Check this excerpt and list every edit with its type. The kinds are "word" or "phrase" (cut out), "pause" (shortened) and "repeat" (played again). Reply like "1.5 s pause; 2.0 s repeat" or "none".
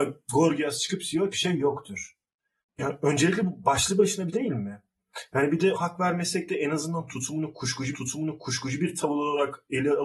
1.3 s phrase; 2.6 s pause; 4.3 s word; 5.7 s word; 7.9 s repeat